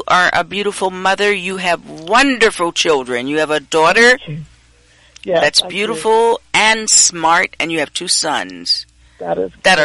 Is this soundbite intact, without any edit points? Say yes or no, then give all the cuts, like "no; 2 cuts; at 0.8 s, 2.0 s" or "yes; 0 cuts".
yes; 0 cuts